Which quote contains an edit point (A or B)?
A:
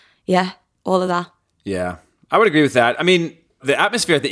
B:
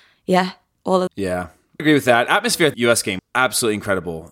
B